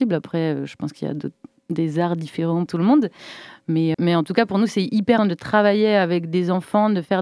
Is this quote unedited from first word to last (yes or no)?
no